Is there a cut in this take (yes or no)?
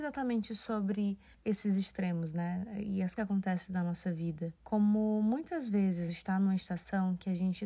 yes